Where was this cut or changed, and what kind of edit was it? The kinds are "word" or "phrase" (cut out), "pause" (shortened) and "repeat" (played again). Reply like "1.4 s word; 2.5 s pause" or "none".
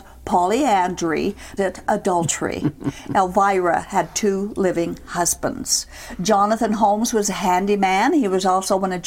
1.6 s phrase

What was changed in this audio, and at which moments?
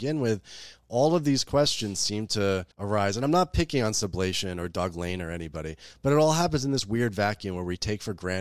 2.7 s pause

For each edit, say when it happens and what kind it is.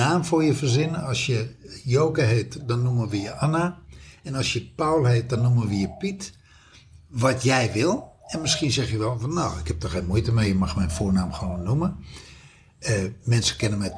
none

